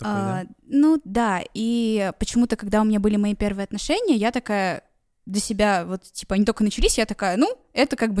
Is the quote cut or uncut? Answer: uncut